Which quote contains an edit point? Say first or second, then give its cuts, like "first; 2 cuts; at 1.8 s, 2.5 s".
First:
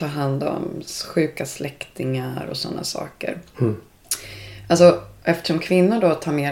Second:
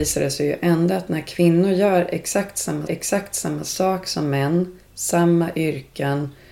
second; 1 cut; at 2.9 s